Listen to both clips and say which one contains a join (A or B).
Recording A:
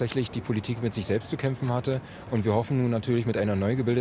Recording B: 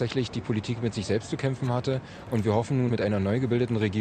B